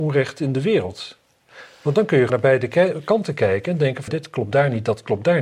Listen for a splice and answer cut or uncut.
cut